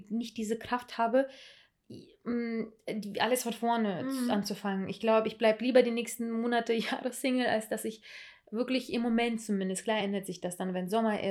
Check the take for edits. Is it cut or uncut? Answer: uncut